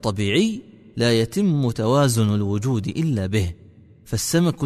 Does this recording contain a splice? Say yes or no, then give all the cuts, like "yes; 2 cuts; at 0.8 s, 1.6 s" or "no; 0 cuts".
no; 0 cuts